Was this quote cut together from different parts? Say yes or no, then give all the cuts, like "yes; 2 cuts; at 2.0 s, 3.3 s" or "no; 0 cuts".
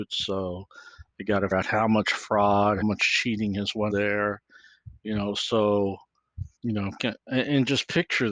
yes; 4 cuts; at 1.5 s, 2.8 s, 3.9 s, 6.6 s